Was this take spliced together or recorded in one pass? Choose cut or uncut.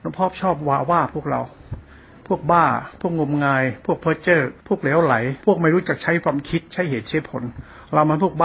cut